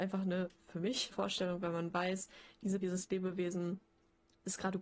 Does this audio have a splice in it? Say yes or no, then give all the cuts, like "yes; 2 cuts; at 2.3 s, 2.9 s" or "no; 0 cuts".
yes; 2 cuts; at 1.1 s, 2.8 s